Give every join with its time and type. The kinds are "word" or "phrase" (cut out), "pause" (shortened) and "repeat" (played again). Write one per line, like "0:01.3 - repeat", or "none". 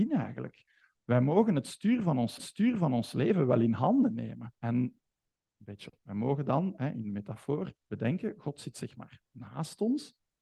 0:02.4 - repeat
0:04.6 - pause
0:06.0 - word
0:07.8 - pause